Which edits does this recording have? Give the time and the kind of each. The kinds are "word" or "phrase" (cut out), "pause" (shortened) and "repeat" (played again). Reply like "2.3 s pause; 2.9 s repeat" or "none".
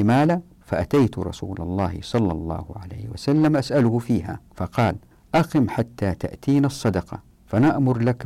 4.5 s pause